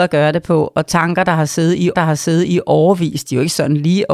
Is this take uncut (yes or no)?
no